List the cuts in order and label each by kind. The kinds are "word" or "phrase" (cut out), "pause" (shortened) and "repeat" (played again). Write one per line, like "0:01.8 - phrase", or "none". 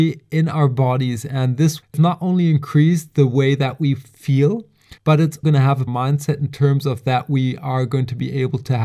0:01.8 - word
0:05.0 - pause
0:05.4 - word
0:05.9 - phrase